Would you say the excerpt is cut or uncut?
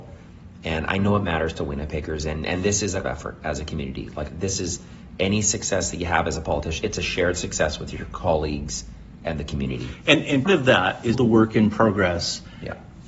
cut